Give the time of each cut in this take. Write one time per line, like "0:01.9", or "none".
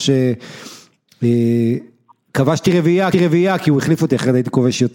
0:03.1

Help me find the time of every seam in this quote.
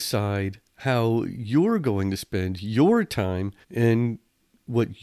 0:03.6

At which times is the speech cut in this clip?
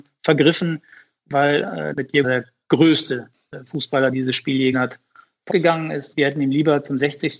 0:01.9
0:02.2
0:04.1
0:04.7
0:05.5
0:06.1

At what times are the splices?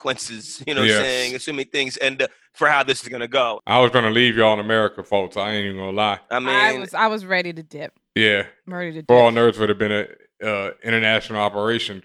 0:03.0

